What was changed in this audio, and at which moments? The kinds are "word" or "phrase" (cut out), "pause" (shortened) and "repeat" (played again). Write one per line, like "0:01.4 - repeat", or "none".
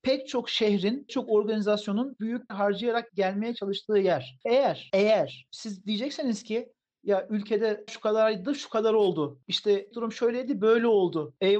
0:01.1 - word
0:02.2 - word
0:02.5 - word
0:03.1 - word
0:07.9 - word
0:09.9 - word

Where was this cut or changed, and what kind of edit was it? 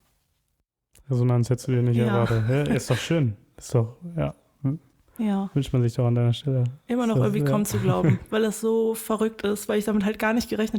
none

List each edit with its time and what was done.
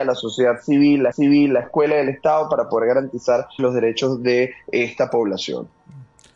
0:01.1 - repeat
0:03.6 - word

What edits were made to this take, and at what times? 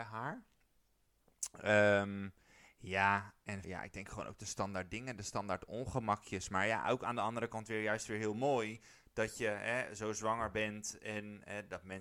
0:03.6 - word

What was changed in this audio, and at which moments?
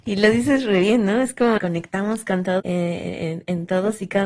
0:01.6 - word
0:02.6 - phrase

